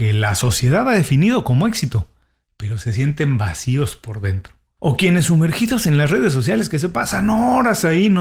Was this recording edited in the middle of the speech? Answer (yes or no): no